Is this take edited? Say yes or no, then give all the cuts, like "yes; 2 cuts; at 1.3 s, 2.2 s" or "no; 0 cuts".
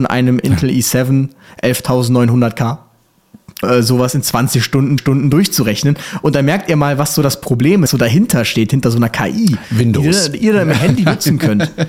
yes; 3 cuts; at 3.6 s, 5.0 s, 7.9 s